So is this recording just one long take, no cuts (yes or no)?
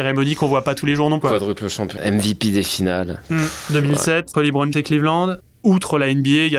no